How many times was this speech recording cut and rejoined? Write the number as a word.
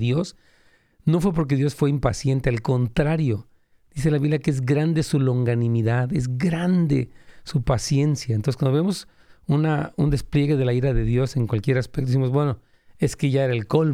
zero